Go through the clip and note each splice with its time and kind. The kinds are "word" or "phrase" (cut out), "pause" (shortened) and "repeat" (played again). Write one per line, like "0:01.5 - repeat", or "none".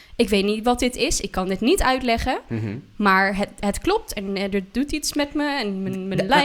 none